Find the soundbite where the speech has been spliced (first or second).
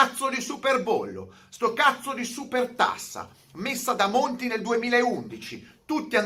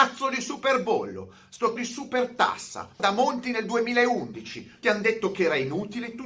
second